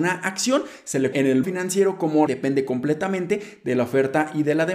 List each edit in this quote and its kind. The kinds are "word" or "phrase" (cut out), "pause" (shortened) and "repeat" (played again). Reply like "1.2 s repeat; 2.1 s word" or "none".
1.1 s word; 1.4 s word; 2.3 s phrase